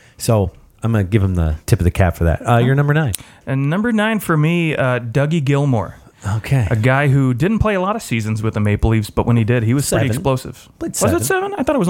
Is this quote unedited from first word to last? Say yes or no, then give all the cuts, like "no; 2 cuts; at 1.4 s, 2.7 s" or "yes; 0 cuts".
no; 1 cut; at 1.6 s